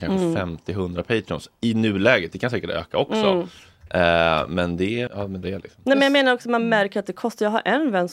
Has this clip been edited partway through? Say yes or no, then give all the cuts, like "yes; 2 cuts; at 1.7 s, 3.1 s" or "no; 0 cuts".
yes; 2 cuts; at 5.1 s, 5.4 s